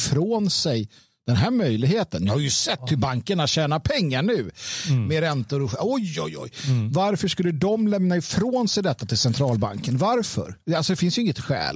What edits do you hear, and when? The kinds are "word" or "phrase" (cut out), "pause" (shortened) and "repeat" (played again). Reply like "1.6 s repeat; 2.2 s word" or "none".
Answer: none